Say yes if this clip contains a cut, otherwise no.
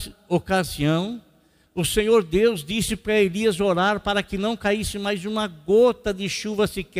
no